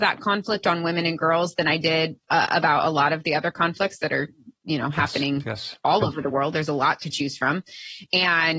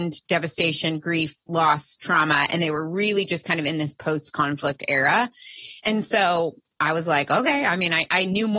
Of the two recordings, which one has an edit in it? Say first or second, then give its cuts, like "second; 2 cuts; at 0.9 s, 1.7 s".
first; 3 cuts; at 2.2 s, 4.6 s, 5.8 s